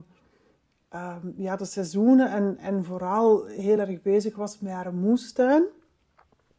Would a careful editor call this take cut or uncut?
uncut